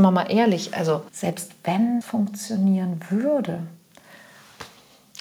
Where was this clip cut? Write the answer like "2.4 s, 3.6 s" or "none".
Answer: 1.1 s, 2.0 s